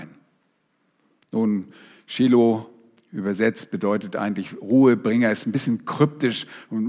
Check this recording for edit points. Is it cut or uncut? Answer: uncut